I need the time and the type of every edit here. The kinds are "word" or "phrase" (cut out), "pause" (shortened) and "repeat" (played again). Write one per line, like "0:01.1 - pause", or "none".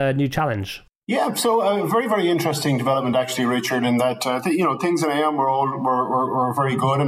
none

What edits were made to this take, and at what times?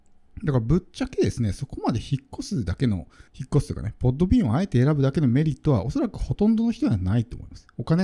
0:03.3 - pause

